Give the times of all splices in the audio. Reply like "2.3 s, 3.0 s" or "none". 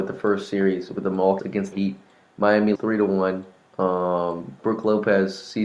1.4 s, 1.7 s, 2.7 s, 4.6 s